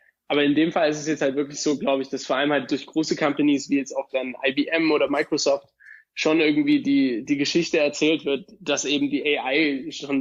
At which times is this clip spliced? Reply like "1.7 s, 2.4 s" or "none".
none